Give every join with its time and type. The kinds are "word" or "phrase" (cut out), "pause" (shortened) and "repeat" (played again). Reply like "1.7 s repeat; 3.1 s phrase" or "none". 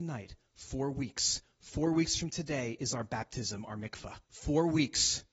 4.2 s pause